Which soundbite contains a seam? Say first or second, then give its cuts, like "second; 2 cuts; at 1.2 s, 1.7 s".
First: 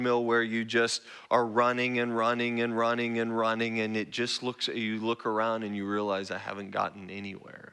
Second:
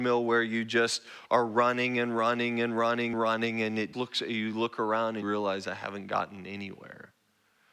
second; 3 cuts; at 3.1 s, 3.9 s, 5.2 s